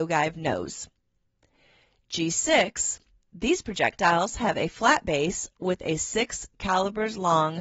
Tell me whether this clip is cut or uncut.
uncut